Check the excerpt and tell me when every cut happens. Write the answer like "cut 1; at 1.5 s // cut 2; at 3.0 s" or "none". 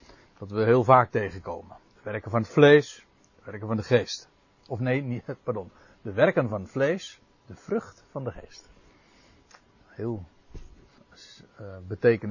none